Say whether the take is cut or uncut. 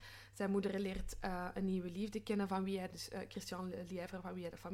uncut